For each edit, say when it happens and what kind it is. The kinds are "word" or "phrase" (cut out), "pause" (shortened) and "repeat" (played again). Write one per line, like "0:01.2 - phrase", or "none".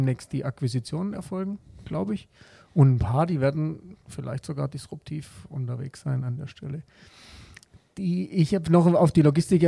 none